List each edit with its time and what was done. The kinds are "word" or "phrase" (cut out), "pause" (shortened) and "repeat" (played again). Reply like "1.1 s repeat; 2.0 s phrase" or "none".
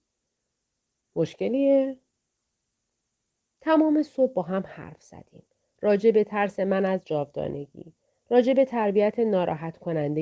none